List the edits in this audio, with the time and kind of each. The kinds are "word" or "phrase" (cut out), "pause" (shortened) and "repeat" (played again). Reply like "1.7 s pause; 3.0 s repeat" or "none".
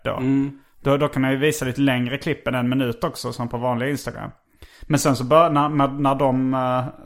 none